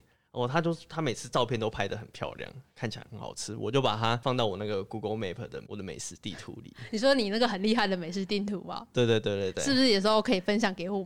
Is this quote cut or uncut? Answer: uncut